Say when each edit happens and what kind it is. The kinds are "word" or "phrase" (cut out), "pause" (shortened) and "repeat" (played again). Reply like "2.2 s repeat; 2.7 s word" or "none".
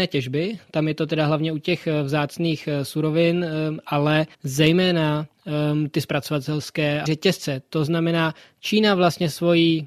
4.3 s pause; 7.1 s word